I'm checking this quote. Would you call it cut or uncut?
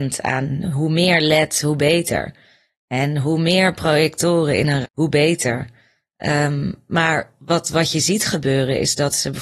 cut